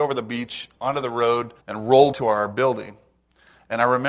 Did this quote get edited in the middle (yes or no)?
yes